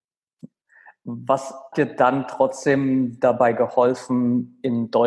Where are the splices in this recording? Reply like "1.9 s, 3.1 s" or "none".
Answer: 1.7 s